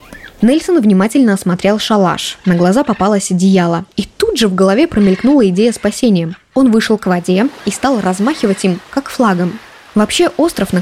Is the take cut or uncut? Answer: uncut